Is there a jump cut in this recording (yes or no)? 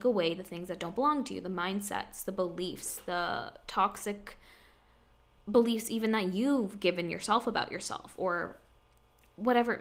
no